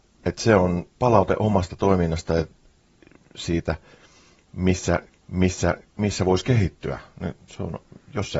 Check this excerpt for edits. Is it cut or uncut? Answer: cut